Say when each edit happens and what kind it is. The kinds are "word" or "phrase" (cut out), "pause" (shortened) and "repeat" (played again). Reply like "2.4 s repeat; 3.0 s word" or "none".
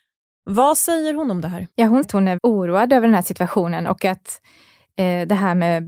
1.7 s pause; 2.0 s word; 2.4 s word